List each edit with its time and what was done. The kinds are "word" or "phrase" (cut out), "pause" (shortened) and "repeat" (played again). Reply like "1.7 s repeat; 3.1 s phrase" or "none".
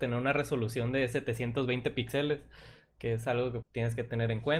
3.6 s word